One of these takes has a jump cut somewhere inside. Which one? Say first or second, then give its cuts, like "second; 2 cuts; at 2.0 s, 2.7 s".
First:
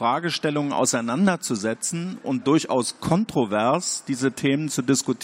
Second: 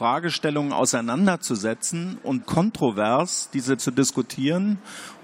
second; 2 cuts; at 2.4 s, 3.8 s